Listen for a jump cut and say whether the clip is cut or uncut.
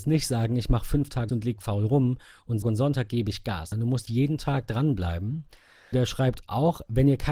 cut